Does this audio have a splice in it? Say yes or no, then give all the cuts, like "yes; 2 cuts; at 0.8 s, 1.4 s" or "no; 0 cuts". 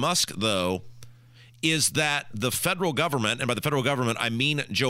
no; 0 cuts